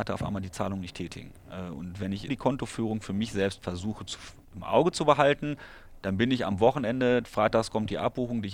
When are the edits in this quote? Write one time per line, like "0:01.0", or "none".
0:02.3